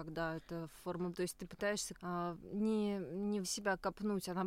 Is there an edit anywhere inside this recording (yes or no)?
yes